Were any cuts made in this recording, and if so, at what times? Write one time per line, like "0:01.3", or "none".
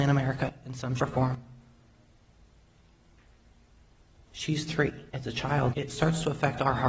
0:01.0
0:05.1
0:05.7